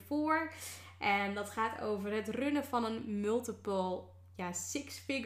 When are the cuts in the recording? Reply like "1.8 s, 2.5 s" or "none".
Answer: none